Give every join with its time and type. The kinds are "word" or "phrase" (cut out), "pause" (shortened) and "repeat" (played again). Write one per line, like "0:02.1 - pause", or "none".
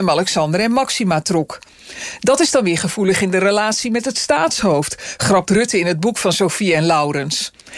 none

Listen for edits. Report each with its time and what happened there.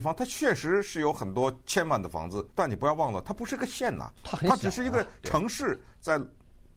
0:02.5 - pause
0:04.2 - pause

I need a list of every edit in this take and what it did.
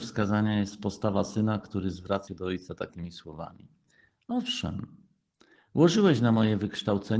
0:02.3 - word

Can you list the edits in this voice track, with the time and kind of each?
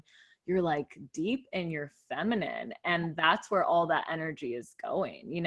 none

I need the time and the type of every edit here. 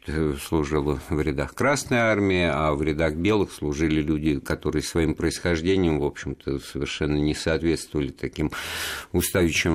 none

